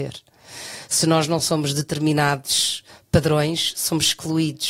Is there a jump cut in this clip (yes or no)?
no